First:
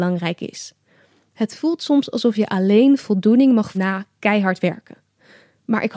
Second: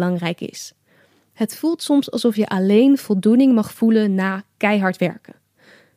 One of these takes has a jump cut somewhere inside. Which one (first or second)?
first